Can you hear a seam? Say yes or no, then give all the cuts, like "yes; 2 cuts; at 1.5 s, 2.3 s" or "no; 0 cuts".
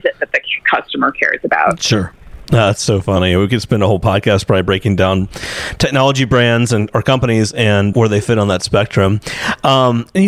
yes; 1 cut; at 7.9 s